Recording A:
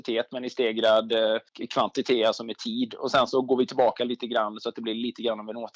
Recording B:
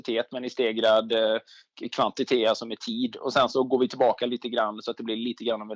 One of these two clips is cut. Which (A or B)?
A